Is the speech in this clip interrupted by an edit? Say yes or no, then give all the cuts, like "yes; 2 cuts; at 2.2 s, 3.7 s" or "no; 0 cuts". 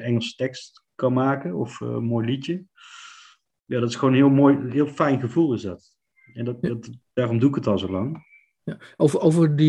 no; 0 cuts